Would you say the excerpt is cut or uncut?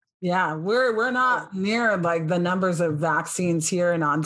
uncut